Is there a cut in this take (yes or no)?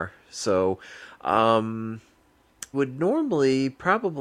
yes